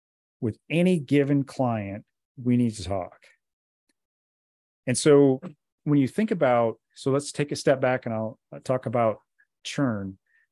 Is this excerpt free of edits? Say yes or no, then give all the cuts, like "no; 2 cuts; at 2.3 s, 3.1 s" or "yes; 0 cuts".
yes; 0 cuts